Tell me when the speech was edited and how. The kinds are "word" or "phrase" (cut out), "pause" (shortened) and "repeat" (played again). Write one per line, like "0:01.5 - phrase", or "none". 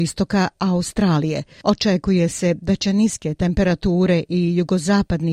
none